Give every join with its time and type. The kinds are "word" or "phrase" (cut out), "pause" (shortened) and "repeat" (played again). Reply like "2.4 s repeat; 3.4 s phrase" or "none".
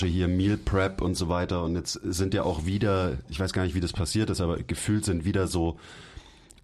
none